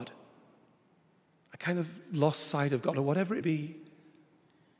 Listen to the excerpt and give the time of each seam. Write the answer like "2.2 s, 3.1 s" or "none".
3.4 s